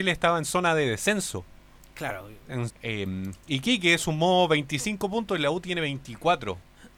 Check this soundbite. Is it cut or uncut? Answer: cut